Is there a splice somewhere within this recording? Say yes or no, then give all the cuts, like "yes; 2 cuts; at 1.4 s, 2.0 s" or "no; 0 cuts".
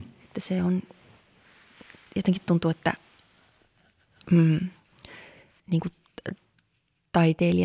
yes; 1 cut; at 5.6 s